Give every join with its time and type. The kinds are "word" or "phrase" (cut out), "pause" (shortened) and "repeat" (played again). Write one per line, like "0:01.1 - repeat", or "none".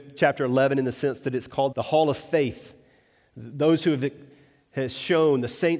0:01.7 - word